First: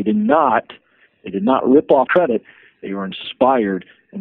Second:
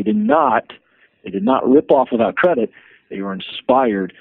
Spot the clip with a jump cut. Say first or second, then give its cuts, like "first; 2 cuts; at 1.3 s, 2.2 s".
first; 1 cut; at 2.1 s